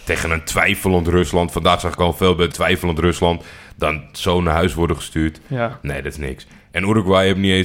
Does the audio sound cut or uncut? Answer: cut